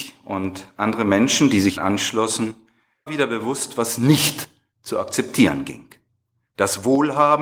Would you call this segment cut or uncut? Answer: cut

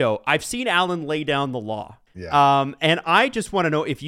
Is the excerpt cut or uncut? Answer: cut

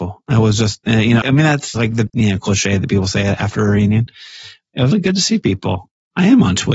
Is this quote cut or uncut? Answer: cut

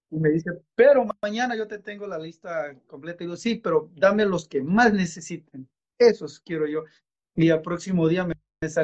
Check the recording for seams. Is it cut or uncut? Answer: uncut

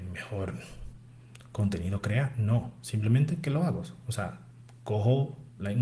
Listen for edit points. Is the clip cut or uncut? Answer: uncut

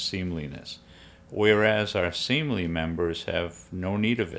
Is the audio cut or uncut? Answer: uncut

